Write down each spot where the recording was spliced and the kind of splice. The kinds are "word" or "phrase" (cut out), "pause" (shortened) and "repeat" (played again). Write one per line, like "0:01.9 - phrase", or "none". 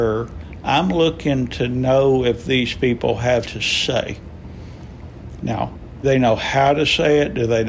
0:03.4 - word
0:06.0 - word